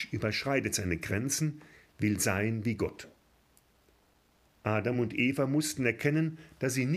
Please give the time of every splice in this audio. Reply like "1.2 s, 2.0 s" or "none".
none